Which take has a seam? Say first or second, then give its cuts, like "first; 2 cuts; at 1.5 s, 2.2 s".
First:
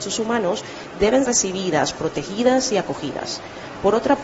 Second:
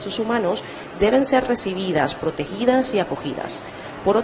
first; 1 cut; at 1.2 s